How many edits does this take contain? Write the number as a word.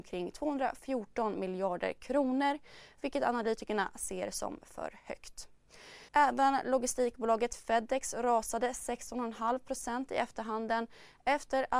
one